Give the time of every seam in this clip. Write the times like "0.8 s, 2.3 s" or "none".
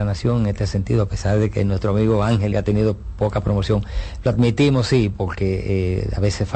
2.5 s, 5.1 s